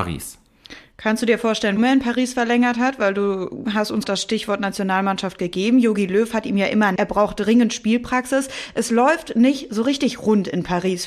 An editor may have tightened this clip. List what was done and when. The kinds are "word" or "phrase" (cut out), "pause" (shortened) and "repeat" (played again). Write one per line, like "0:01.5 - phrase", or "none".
0:01.8 - word
0:04.0 - word
0:07.0 - word